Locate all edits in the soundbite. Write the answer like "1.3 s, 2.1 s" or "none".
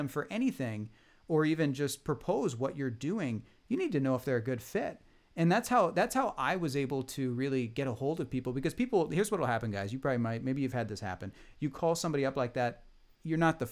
none